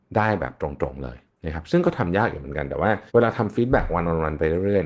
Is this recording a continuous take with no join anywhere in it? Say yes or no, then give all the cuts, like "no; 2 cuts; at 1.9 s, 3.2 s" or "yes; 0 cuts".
no; 2 cuts; at 1.3 s, 3.1 s